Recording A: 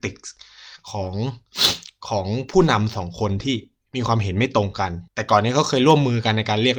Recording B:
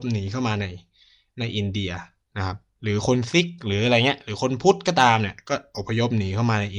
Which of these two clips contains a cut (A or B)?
A